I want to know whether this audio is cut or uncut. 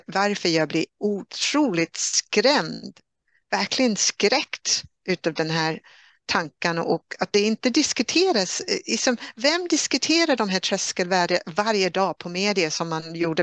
uncut